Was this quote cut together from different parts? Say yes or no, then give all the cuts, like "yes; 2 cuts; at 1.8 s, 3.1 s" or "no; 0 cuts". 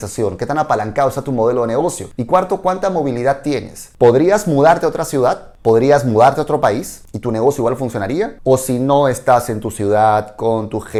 no; 0 cuts